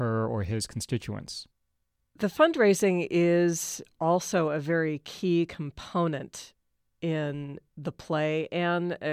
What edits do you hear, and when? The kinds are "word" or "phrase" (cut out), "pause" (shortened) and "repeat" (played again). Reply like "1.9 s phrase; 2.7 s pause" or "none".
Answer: none